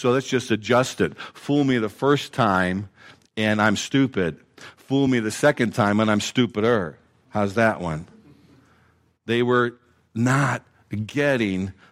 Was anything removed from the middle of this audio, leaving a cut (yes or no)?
no